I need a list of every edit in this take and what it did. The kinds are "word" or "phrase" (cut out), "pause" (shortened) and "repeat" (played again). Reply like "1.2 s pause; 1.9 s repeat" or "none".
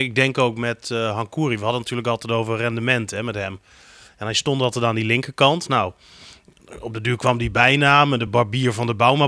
none